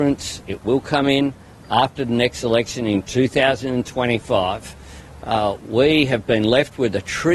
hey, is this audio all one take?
yes; 0 cuts

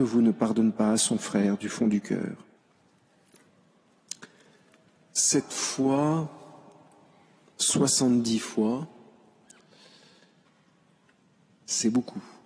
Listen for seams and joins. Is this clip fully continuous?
yes; 0 cuts

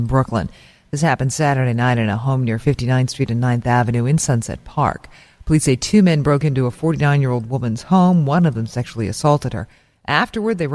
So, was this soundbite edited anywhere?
no; 0 cuts

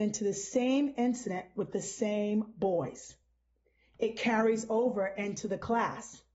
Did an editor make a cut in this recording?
no; 0 cuts

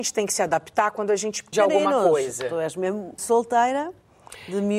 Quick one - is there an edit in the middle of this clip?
yes; 2 cuts; at 1.5 s, 3.2 s

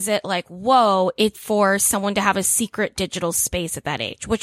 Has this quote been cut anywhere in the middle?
yes; 1 cut; at 1.3 s

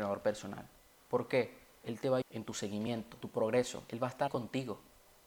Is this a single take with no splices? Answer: no; 3 cuts; at 2.2 s, 3.2 s, 4.3 s

